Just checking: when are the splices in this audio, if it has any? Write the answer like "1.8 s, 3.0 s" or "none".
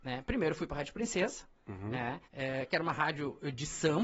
2.3 s